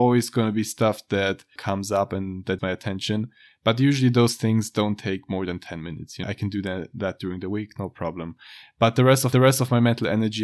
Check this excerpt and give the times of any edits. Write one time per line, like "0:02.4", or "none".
0:01.6
0:02.6
0:06.2
0:09.3